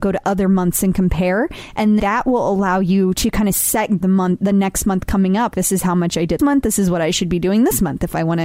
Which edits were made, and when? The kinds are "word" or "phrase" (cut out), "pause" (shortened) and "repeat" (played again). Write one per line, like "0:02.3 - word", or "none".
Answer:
0:02.0 - word
0:04.0 - phrase
0:05.5 - word
0:06.4 - word